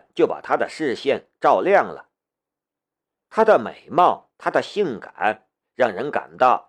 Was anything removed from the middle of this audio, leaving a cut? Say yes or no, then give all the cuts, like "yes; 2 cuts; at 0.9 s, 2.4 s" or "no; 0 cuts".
no; 0 cuts